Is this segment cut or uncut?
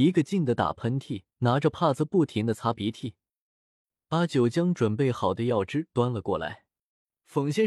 cut